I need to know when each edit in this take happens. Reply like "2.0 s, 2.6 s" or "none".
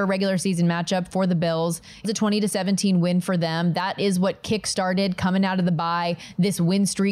2.0 s